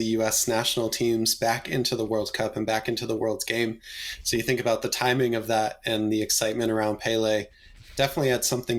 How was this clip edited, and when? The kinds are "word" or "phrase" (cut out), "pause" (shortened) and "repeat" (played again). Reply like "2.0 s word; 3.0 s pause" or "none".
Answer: none